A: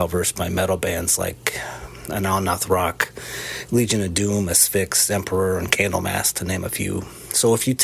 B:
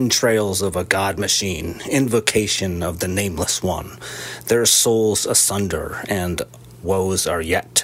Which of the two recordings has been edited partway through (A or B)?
B